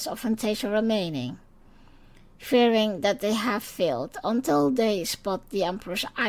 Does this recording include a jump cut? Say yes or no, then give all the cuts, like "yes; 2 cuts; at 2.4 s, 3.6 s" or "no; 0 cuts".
no; 0 cuts